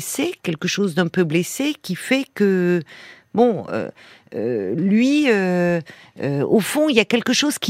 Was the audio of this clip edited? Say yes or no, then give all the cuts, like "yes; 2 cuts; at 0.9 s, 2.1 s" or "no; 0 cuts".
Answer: no; 0 cuts